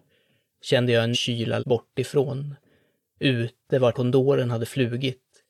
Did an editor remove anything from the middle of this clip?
yes; 3 cuts; at 1.1 s, 1.6 s, 3.9 s

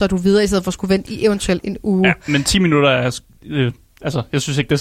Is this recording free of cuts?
yes; 0 cuts

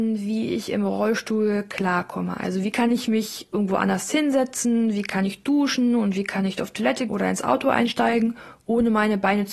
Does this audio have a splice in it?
yes; 1 cut; at 7.1 s

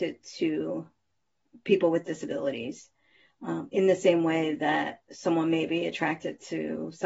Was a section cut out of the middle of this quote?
no; 0 cuts

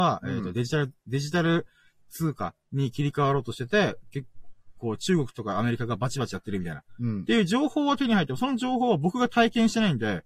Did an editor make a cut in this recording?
no; 0 cuts

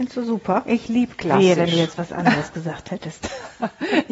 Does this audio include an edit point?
no; 0 cuts

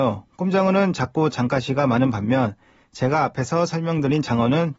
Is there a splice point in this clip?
no; 0 cuts

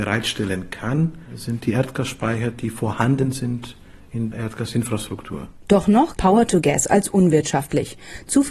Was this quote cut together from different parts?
yes; 2 cuts; at 4.3 s, 6.2 s

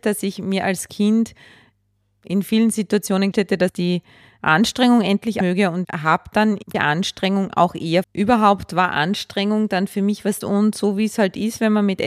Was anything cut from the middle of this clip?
yes; 6 cuts; at 3.3 s, 5.4 s, 5.8 s, 6.7 s, 8.0 s, 10.4 s

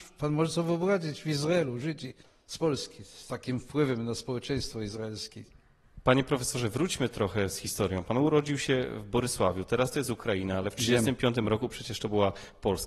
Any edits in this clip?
yes; 1 cut; at 2.2 s

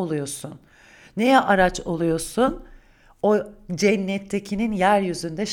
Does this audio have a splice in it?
no; 0 cuts

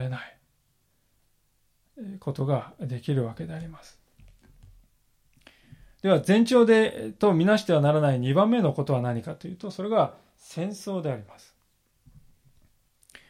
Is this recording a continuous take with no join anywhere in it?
yes; 0 cuts

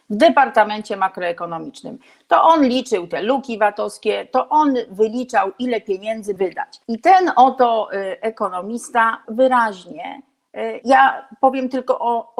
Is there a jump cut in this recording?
yes; 4 cuts; at 6.4 s, 6.8 s, 9.2 s, 10.8 s

